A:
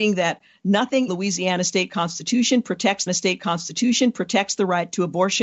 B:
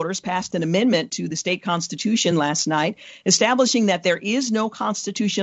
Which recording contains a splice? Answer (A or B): A